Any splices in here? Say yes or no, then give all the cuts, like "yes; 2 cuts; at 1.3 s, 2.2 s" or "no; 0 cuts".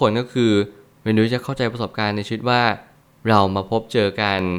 no; 0 cuts